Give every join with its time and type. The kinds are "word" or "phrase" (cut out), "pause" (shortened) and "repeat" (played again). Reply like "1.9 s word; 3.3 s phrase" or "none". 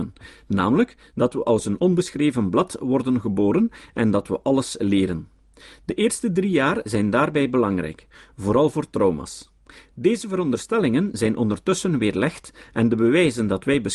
none